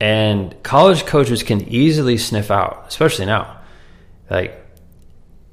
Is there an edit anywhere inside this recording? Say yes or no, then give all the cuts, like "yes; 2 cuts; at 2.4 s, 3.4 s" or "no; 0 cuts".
no; 0 cuts